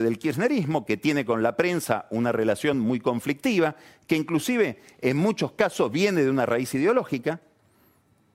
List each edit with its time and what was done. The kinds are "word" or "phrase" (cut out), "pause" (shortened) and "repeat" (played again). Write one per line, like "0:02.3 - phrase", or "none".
none